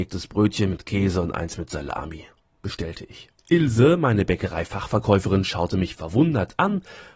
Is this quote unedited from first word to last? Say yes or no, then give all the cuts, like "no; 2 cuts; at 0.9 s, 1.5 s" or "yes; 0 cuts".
yes; 0 cuts